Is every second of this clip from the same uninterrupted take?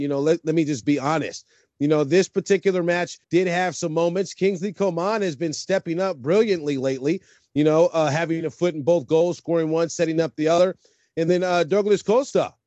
no; 1 cut; at 3.2 s

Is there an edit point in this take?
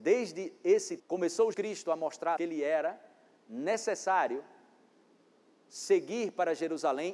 yes; 3 cuts; at 1.0 s, 1.5 s, 2.4 s

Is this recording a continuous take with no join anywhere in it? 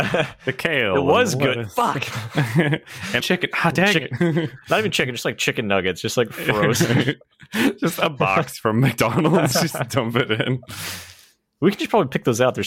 no; 1 cut; at 3.2 s

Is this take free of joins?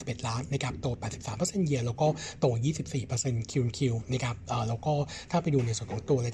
yes; 0 cuts

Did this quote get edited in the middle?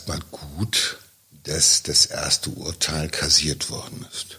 yes; 1 cut; at 1.2 s

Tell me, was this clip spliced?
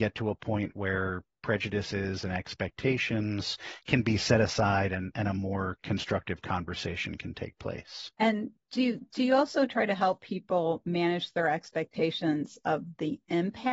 yes; 1 cut; at 8.1 s

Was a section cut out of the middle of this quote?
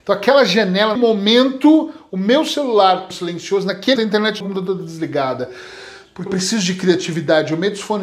yes; 5 cuts; at 1.0 s, 3.1 s, 4.0 s, 4.4 s, 6.3 s

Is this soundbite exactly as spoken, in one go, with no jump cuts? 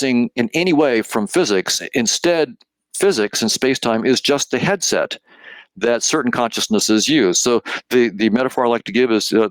yes; 0 cuts

